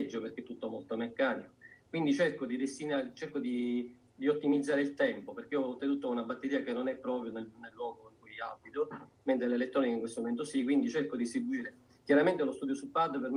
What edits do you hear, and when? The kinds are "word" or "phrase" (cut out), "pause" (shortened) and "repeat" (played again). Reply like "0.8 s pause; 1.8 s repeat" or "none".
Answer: none